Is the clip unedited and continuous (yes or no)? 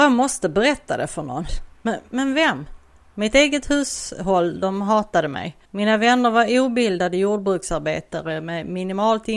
no